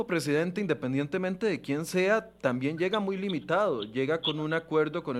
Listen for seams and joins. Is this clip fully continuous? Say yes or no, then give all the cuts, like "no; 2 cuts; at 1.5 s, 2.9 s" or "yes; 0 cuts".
yes; 0 cuts